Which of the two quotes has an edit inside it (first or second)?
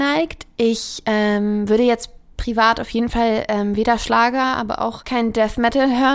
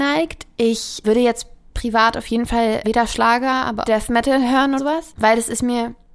second